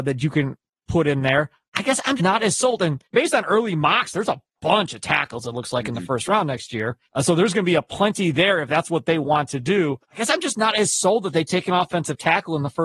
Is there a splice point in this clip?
yes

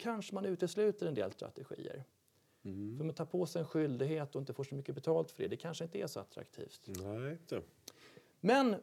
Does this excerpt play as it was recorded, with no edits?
no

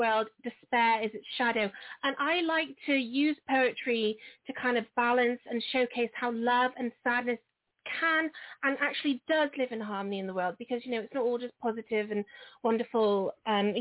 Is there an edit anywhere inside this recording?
no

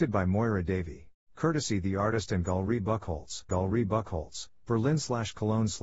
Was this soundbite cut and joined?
yes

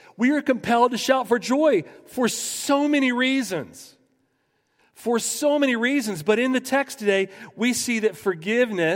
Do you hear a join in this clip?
no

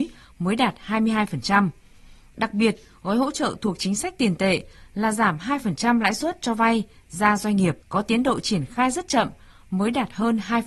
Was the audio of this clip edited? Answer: yes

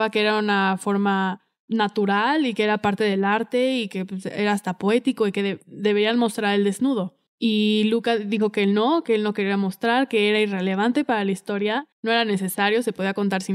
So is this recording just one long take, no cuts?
no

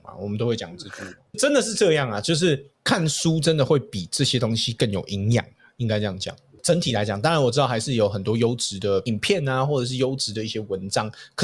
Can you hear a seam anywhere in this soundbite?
yes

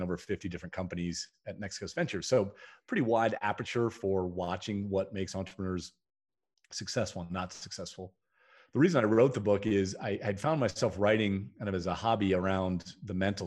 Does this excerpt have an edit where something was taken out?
no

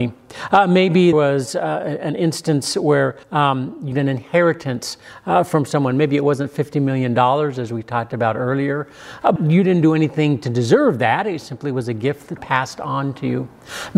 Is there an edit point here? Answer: yes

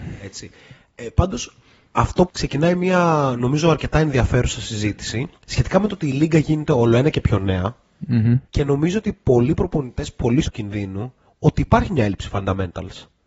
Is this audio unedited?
no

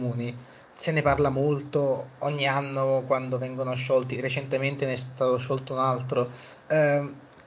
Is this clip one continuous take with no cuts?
yes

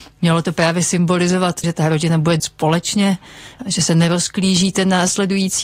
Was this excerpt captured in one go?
no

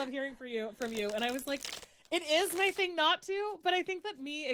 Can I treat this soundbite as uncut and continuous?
yes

